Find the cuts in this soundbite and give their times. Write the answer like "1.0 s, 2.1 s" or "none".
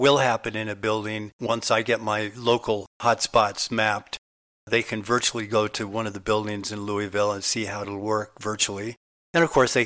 none